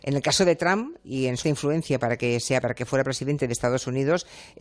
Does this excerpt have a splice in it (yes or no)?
yes